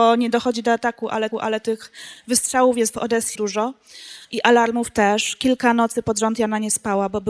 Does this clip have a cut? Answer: yes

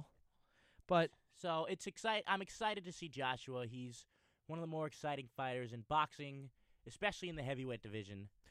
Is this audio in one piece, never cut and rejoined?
yes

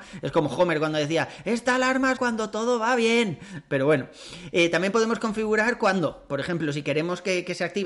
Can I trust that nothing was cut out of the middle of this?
no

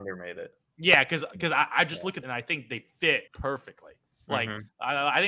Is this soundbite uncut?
no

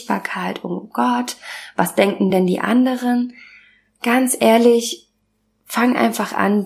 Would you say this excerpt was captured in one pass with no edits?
yes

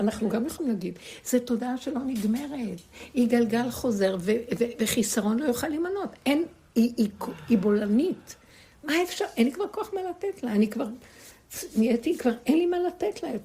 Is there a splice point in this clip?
no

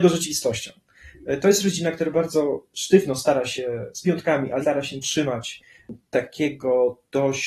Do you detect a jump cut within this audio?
yes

